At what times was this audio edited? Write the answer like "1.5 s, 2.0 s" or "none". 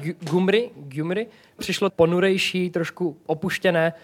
1.6 s, 1.9 s